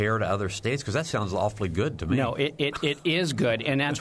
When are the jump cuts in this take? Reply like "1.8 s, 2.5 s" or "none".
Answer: none